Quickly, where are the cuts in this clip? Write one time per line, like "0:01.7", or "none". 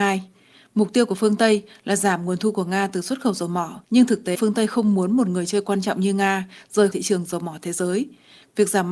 0:03.8
0:04.3
0:06.9